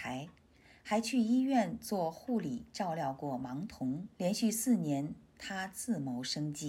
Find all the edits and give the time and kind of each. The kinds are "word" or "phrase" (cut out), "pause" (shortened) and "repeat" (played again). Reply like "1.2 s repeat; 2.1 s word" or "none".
4.1 s pause